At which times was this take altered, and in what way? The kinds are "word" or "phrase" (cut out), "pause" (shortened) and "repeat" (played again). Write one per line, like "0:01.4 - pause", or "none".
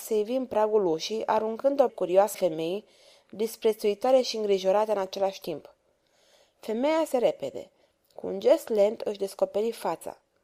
0:01.9 - word
0:02.3 - word
0:07.1 - word